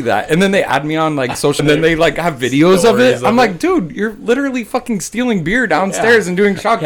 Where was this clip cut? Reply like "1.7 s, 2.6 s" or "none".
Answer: 1.6 s